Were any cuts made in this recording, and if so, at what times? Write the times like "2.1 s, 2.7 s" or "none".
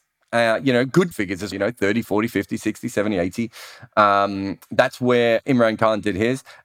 1.1 s, 1.5 s